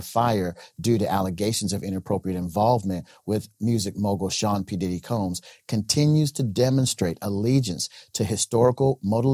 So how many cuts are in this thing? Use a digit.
0